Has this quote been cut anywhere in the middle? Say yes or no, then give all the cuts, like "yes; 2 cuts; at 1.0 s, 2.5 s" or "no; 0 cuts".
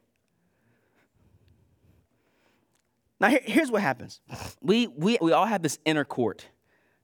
yes; 2 cuts; at 4.6 s, 5.2 s